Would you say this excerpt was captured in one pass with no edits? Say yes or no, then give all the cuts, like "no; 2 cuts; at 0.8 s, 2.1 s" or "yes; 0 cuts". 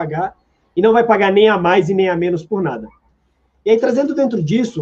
yes; 0 cuts